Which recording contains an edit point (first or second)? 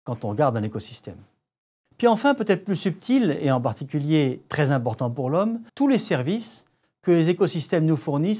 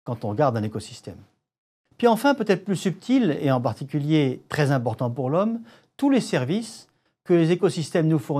first